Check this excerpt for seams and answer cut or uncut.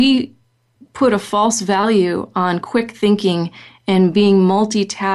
uncut